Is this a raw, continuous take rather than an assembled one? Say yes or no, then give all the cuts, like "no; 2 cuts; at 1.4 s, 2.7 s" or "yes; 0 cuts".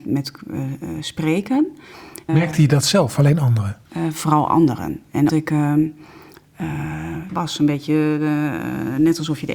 no; 5 cuts; at 2.3 s, 3.1 s, 3.8 s, 5.3 s, 7.3 s